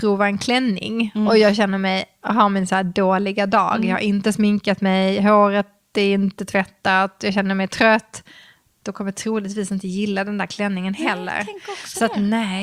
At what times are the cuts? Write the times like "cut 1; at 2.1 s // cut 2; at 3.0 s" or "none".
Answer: none

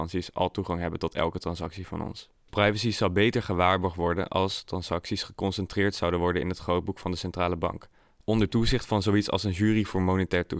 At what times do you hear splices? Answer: cut 1; at 2.4 s

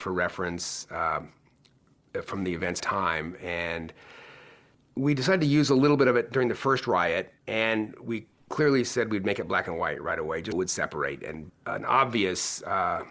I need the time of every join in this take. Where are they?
cut 1; at 2.8 s // cut 2; at 4.7 s // cut 3; at 7.4 s // cut 4; at 10.5 s // cut 5; at 11.5 s

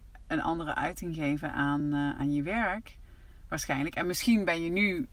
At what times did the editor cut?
none

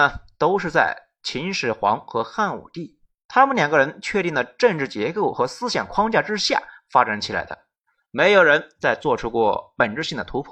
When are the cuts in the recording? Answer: none

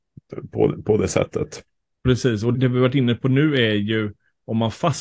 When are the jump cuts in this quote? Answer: cut 1; at 2.5 s

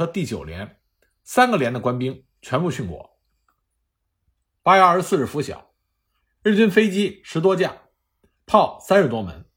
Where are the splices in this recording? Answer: none

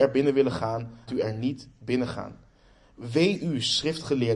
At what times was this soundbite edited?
cut 1; at 1.1 s

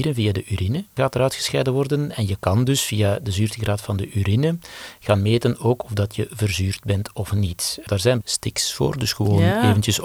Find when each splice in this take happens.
cut 1; at 8.2 s

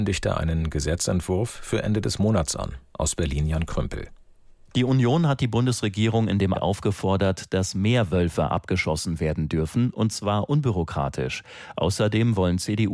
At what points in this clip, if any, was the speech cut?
cut 1; at 6.5 s

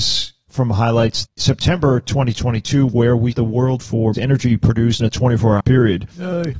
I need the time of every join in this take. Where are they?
cut 1; at 1.3 s // cut 2; at 3.3 s // cut 3; at 3.8 s // cut 4; at 4.1 s // cut 5; at 5.0 s // cut 6; at 5.6 s

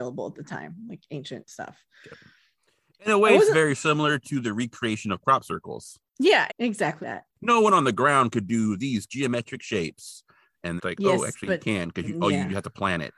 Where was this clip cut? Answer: cut 1; at 6.5 s // cut 2; at 7.0 s // cut 3; at 9.1 s // cut 4; at 10.8 s

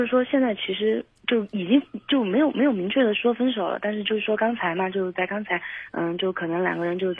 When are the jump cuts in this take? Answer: none

